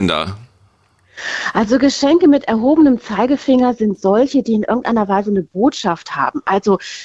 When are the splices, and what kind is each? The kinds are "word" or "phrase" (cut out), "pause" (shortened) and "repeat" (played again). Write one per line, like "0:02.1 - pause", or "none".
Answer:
none